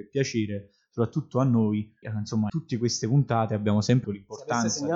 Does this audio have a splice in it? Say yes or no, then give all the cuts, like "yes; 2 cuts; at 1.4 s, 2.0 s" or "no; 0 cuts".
yes; 3 cuts; at 2.0 s, 2.5 s, 4.0 s